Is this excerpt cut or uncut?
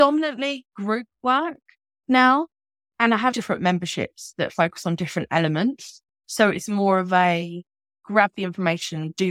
cut